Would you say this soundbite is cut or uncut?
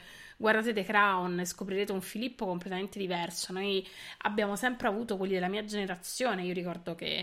uncut